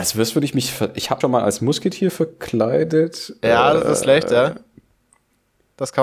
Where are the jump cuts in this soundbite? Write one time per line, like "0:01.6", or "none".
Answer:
0:01.2
0:04.0